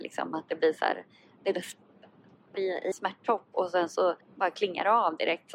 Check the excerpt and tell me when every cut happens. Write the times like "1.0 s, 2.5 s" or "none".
2.5 s, 2.9 s, 4.2 s